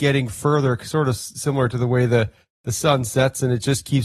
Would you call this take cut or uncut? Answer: uncut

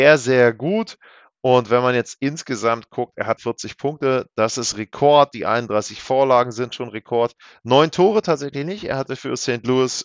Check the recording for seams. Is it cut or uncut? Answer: cut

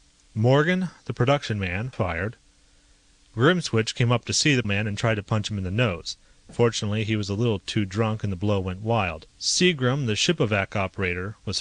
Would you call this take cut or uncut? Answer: cut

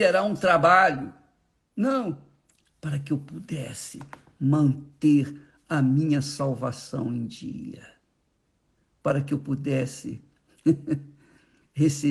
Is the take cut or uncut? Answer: uncut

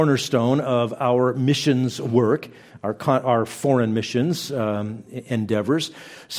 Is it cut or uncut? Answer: uncut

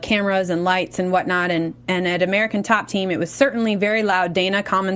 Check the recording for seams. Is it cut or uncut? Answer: uncut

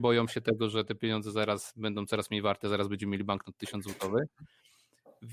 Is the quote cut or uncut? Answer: uncut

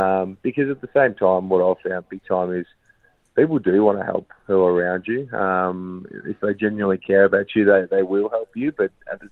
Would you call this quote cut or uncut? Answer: uncut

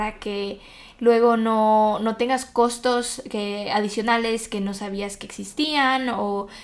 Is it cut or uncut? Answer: uncut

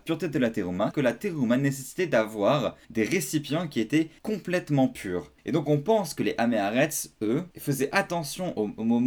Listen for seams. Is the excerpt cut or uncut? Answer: cut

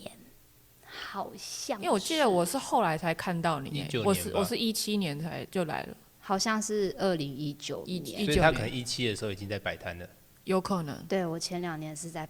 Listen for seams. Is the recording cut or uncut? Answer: uncut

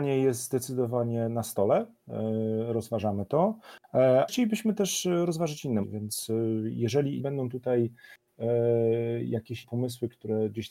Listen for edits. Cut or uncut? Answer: cut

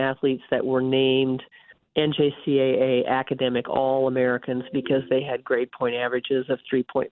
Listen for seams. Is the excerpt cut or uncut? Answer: cut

